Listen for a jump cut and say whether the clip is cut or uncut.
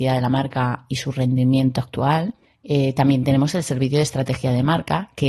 uncut